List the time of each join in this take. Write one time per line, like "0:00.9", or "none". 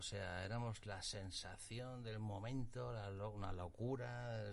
none